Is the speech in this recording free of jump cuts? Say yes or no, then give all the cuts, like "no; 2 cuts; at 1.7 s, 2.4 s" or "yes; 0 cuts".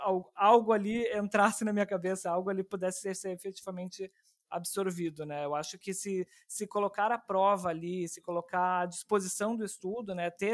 yes; 0 cuts